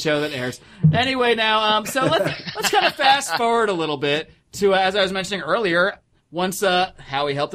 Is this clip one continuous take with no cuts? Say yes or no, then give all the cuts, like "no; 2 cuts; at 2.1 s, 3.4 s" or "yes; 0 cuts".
yes; 0 cuts